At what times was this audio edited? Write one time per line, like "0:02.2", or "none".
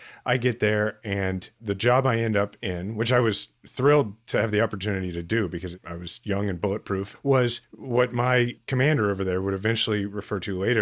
0:07.6